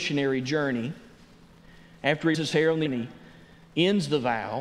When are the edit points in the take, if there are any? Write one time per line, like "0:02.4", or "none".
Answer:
0:02.3
0:02.9